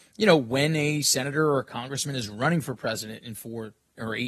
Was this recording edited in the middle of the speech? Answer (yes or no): no